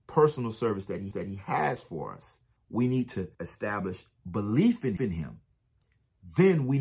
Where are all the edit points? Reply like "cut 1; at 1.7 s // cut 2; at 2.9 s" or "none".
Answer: cut 1; at 1.1 s // cut 2; at 2.6 s // cut 3; at 3.3 s // cut 4; at 5.0 s